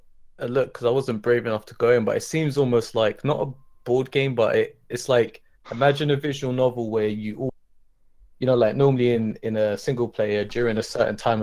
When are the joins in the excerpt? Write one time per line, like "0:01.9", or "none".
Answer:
none